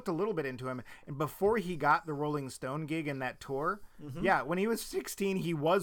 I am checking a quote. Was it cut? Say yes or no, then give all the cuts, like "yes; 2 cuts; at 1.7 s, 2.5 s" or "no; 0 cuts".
no; 0 cuts